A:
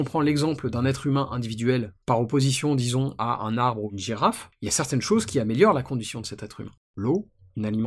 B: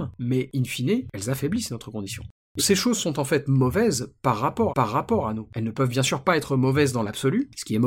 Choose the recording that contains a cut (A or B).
B